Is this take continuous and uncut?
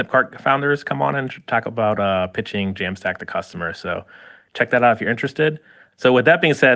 yes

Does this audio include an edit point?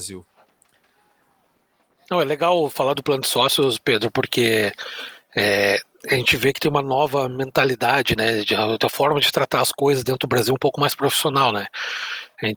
no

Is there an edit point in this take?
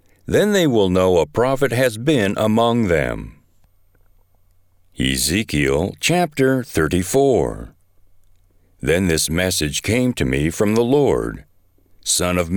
no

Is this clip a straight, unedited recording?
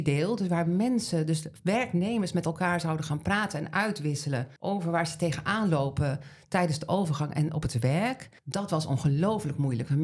no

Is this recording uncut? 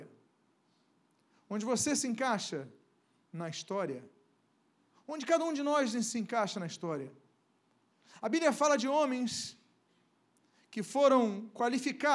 yes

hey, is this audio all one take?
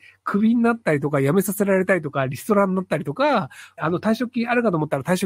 no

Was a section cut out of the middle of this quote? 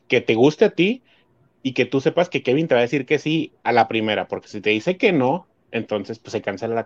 no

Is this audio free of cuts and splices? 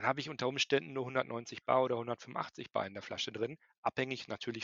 yes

